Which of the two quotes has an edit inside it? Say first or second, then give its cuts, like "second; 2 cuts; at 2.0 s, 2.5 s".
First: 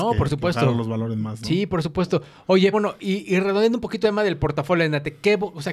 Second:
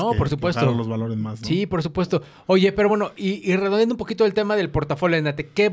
first; 2 cuts; at 2.7 s, 4.0 s